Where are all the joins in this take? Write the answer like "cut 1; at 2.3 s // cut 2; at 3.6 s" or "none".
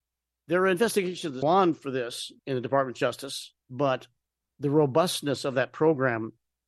cut 1; at 1.4 s // cut 2; at 2.4 s // cut 3; at 3.6 s